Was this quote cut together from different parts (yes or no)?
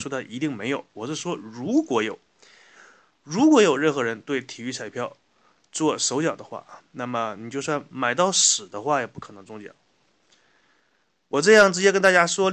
no